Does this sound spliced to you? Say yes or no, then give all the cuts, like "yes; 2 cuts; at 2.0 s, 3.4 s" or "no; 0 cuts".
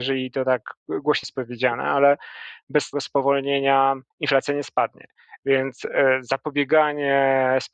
yes; 3 cuts; at 1.2 s, 2.9 s, 4.1 s